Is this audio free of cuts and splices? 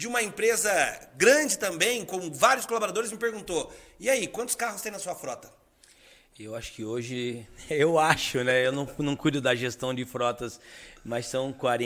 yes; 0 cuts

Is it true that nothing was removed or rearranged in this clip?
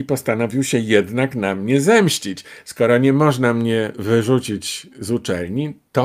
yes; 0 cuts

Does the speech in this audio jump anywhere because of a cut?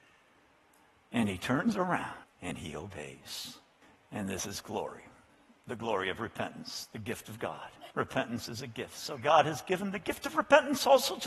yes; 3 cuts; at 2.2 s, 3.8 s, 7.9 s

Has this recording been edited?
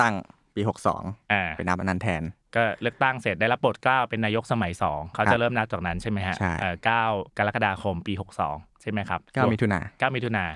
yes; 3 cuts; at 7.3 s, 8.7 s, 9.3 s

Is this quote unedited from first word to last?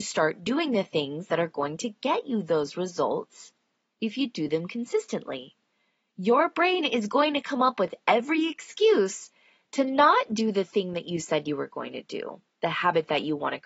yes; 0 cuts

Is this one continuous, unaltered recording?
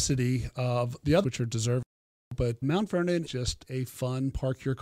no; 3 cuts; at 1.2 s, 2.6 s, 3.3 s

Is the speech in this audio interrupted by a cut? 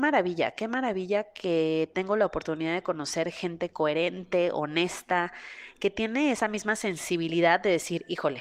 no; 0 cuts

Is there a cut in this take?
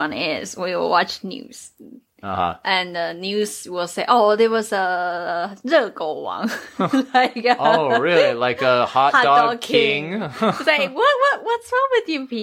no; 0 cuts

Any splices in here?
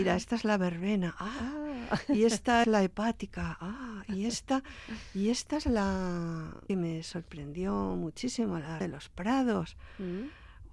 yes; 3 cuts; at 2.6 s, 6.7 s, 8.8 s

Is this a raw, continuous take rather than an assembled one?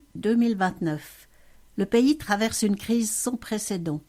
yes; 0 cuts

